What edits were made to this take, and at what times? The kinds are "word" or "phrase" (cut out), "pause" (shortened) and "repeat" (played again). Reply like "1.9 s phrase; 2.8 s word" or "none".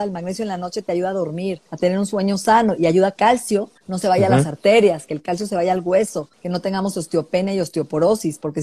1.7 s pause; 3.2 s word; 3.8 s pause; 6.3 s pause